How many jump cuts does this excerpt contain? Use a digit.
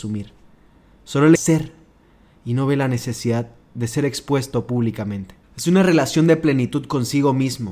2